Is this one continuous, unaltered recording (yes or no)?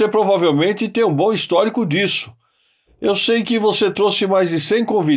yes